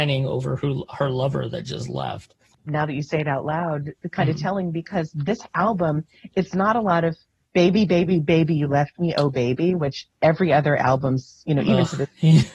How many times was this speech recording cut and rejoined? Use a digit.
0